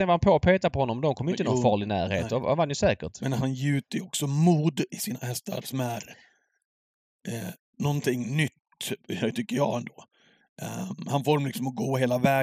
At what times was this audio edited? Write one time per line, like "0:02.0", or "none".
none